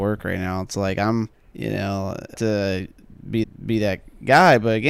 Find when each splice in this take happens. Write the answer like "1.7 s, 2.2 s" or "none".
1.3 s, 2.3 s, 3.4 s